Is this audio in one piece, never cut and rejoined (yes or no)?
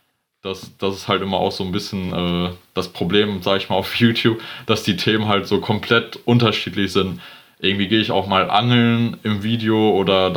yes